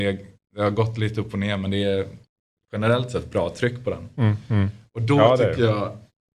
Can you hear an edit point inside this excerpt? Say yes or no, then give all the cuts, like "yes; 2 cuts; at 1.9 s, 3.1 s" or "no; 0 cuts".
no; 0 cuts